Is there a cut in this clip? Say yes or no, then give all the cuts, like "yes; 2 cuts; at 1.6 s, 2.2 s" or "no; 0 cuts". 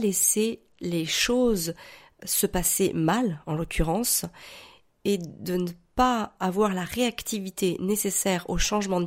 no; 0 cuts